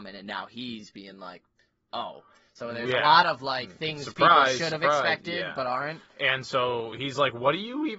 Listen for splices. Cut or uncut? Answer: uncut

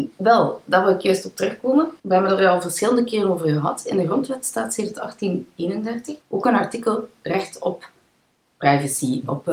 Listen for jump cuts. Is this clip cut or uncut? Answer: cut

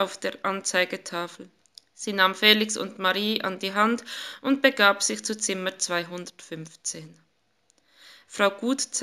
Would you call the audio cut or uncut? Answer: cut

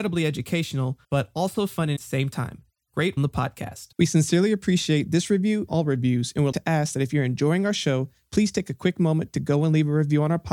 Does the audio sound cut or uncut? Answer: cut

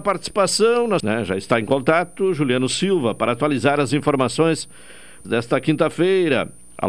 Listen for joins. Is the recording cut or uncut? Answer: cut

